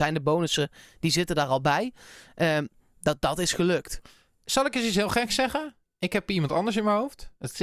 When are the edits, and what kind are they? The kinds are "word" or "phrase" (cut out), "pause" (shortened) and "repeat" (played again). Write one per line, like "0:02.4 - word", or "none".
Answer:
none